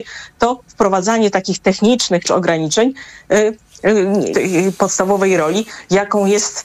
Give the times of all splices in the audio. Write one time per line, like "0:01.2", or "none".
0:02.2
0:04.3